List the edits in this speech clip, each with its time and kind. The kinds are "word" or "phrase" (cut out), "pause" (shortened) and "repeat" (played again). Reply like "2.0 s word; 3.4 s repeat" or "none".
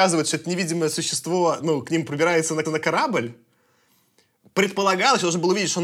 2.6 s repeat